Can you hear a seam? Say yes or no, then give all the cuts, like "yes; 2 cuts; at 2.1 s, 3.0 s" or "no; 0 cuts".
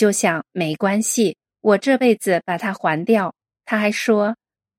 yes; 1 cut; at 3.4 s